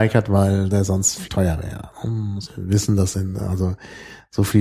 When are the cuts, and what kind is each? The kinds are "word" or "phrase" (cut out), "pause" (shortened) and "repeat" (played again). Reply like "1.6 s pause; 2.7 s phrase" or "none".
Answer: 1.3 s word; 2.5 s word; 3.1 s word